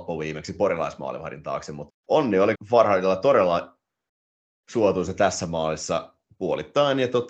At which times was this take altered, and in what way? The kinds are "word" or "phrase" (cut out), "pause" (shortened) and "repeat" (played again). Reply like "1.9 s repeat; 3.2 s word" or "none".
1.9 s phrase; 2.5 s word

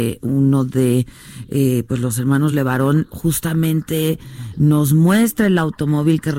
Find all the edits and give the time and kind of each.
none

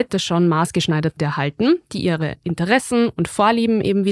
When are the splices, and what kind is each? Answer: 1.2 s word

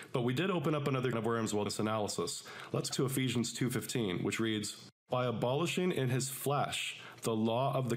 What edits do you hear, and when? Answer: 1.1 s word; 1.7 s word; 2.9 s phrase; 5.0 s pause

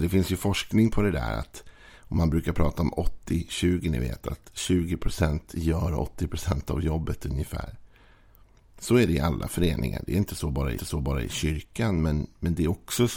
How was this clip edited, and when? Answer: 10.8 s repeat

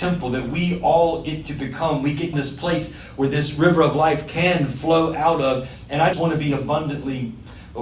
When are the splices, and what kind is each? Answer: 2.3 s phrase; 6.1 s word

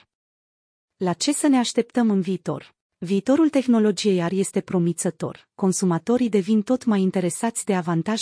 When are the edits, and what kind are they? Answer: 2.8 s pause

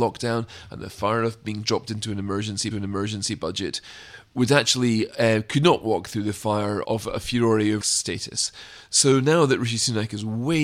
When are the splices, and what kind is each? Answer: 2.7 s repeat; 7.8 s phrase

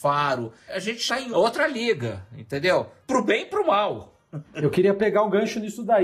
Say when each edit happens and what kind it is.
none

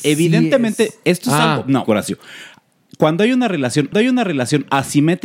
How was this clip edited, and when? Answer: 1.8 s word; 3.9 s repeat

